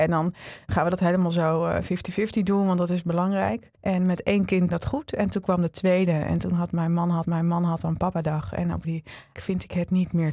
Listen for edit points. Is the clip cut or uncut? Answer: cut